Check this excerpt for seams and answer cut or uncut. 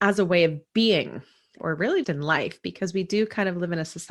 cut